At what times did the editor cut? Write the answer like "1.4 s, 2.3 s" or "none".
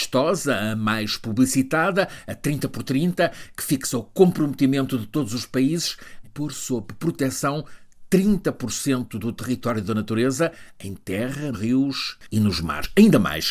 6.2 s, 11.5 s